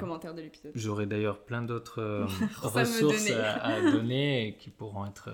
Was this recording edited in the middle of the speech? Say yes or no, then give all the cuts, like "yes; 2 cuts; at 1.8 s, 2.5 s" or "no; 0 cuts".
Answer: yes; 1 cut; at 2.6 s